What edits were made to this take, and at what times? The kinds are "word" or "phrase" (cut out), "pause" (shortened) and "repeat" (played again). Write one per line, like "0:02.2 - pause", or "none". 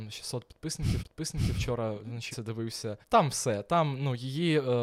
0:01.0 - repeat
0:02.3 - phrase
0:03.0 - pause